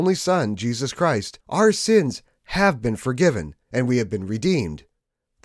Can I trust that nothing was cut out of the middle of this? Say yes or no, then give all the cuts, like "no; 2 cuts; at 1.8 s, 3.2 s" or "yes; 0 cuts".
no; 2 cuts; at 1.4 s, 3.6 s